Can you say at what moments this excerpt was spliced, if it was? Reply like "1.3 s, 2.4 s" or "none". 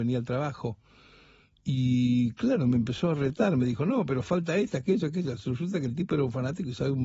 none